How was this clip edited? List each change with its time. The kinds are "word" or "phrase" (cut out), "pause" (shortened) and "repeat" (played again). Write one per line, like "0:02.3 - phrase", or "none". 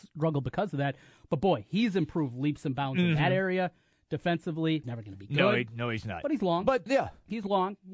0:04.8 - word
0:06.9 - word